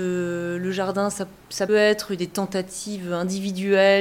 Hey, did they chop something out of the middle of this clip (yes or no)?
yes